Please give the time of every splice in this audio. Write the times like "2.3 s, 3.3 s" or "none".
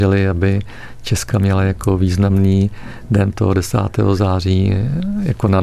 1.3 s, 3.3 s